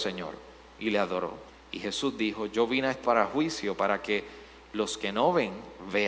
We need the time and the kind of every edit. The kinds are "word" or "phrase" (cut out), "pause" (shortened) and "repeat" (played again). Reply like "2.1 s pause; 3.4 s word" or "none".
1.5 s pause; 3.0 s word